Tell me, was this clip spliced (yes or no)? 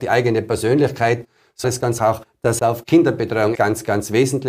yes